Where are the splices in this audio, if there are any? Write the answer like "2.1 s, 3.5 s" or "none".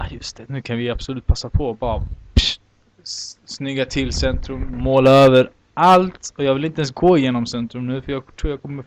none

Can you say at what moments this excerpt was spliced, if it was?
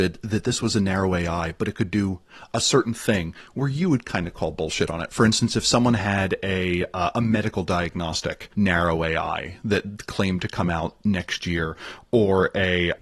8.5 s

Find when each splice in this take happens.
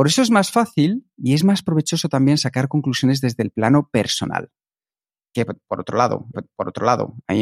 1.1 s, 6.3 s

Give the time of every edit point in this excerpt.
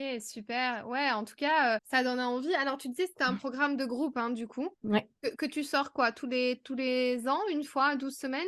1.8 s, 4.8 s

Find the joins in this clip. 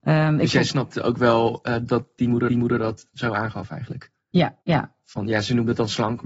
2.5 s, 4.6 s

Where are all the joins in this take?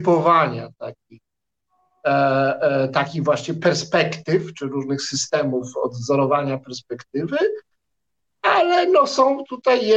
none

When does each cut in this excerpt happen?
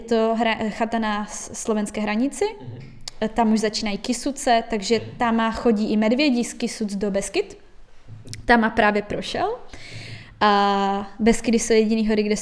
none

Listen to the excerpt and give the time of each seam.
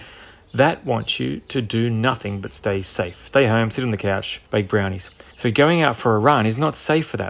4.5 s, 5.3 s

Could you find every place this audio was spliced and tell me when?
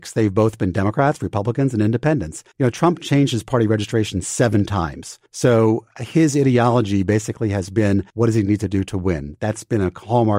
2.5 s, 5.3 s, 8.1 s

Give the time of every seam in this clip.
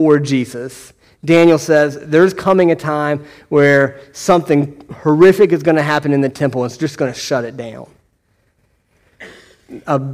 none

